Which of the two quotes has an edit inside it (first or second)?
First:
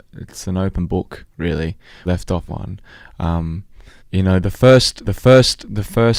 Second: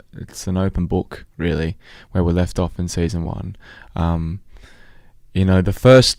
first